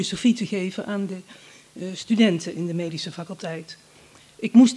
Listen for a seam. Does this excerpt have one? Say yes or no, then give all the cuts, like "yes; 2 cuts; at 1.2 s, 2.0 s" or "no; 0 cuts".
no; 0 cuts